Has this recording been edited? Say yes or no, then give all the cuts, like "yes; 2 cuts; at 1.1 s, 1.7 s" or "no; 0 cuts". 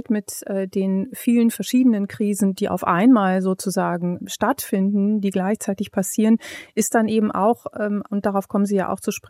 no; 0 cuts